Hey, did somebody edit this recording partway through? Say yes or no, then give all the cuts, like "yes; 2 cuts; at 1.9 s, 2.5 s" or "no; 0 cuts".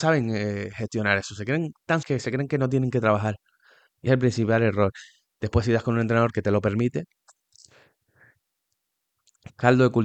yes; 2 cuts; at 2.0 s, 4.1 s